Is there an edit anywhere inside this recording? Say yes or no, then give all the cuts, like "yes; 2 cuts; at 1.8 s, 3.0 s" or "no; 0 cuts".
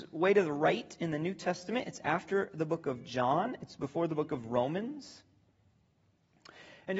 no; 0 cuts